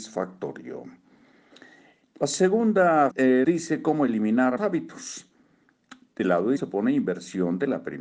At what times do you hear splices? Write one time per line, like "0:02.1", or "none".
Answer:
0:03.1
0:03.4
0:04.6
0:06.6